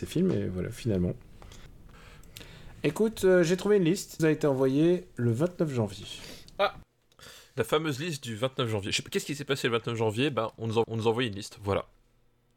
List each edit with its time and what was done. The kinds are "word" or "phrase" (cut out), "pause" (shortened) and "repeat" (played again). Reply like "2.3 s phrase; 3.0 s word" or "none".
4.2 s phrase; 10.8 s repeat